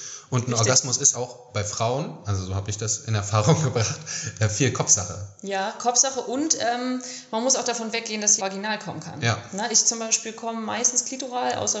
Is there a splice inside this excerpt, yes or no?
yes